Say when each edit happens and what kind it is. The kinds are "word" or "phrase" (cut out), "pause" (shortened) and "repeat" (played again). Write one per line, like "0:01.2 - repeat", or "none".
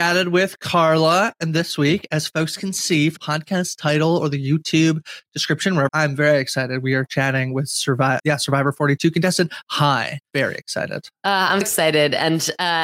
0:03.2 - word
0:05.9 - phrase
0:08.2 - word
0:10.3 - word
0:11.6 - word